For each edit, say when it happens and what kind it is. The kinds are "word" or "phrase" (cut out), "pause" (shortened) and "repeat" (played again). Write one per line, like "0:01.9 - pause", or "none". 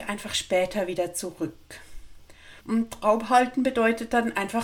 0:02.6 - pause